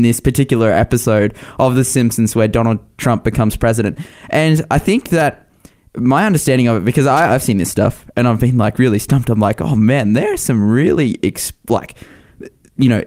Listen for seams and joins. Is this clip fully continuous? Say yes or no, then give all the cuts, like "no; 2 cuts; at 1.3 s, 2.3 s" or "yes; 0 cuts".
yes; 0 cuts